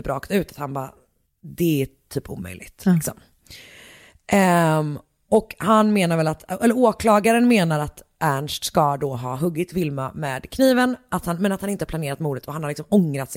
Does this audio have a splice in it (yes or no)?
no